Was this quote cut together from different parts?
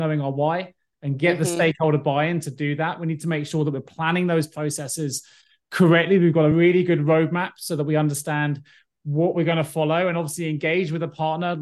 no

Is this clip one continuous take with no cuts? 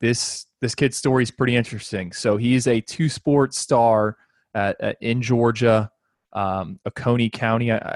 yes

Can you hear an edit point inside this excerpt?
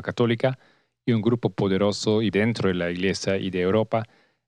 yes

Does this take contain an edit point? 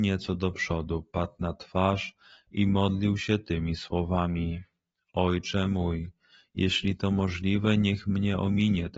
no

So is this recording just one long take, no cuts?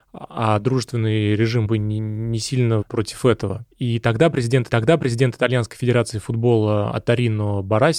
no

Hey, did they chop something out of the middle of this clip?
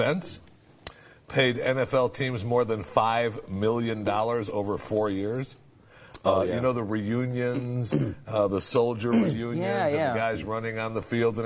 no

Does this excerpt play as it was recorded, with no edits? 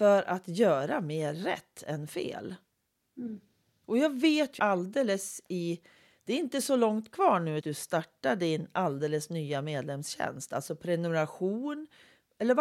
no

